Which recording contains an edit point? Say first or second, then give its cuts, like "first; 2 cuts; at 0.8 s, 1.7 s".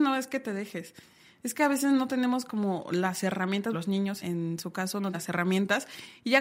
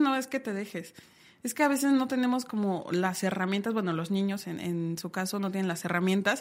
first; 3 cuts; at 3.7 s, 4.2 s, 5.1 s